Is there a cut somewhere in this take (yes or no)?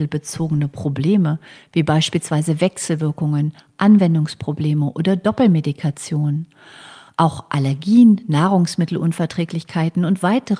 no